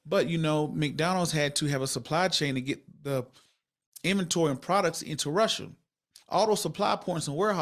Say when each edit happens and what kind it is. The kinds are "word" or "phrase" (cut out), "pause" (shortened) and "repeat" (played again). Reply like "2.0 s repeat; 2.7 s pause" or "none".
6.2 s pause

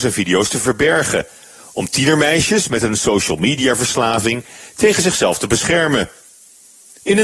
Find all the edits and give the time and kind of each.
none

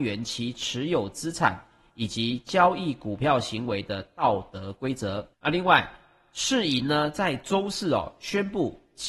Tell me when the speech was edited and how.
5.3 s pause

